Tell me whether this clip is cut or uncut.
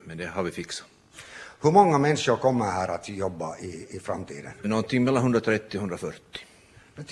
cut